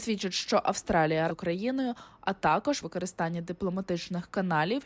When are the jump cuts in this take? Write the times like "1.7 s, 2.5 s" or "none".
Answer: 1.3 s, 2.8 s